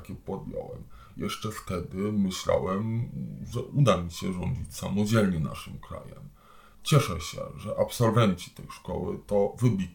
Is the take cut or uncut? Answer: uncut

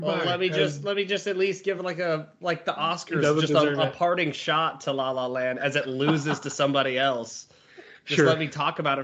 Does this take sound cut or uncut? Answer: uncut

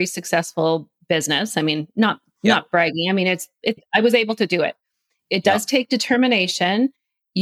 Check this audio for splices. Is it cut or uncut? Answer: uncut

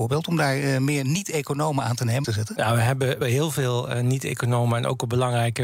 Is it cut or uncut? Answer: cut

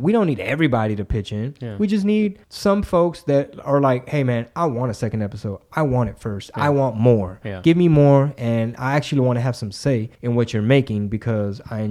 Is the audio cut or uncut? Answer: cut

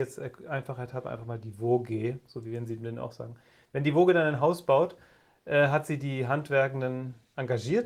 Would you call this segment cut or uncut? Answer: uncut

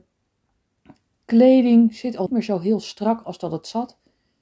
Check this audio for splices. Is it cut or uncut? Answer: cut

